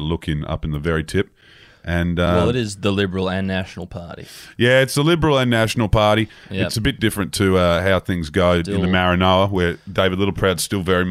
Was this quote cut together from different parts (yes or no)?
no